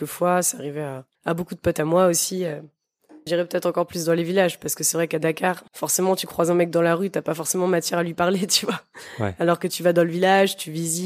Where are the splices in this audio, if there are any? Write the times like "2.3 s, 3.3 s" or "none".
1.1 s, 3.3 s, 5.7 s